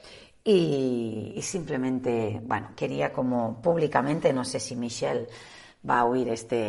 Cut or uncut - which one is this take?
uncut